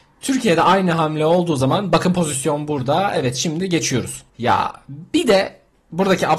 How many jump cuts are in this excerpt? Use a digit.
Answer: 1